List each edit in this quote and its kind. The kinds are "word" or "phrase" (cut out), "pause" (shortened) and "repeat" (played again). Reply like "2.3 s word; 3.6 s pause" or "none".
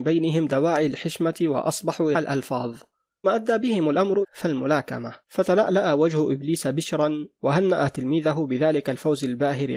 2.1 s phrase; 3.2 s word; 4.2 s phrase; 5.2 s pause